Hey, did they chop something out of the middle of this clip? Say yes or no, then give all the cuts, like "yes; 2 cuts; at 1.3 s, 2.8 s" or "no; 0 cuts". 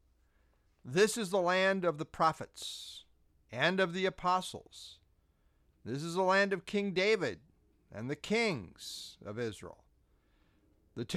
no; 0 cuts